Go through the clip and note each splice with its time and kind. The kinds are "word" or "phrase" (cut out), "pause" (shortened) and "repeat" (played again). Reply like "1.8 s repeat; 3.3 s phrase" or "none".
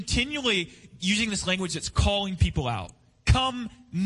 none